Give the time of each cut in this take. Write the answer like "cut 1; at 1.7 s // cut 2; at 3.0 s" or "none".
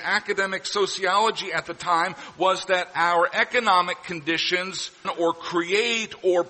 cut 1; at 5.0 s